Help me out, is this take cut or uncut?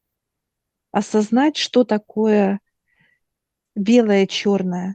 uncut